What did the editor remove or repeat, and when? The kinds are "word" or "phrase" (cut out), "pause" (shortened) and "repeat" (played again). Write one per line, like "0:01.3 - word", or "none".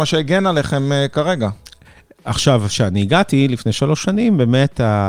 none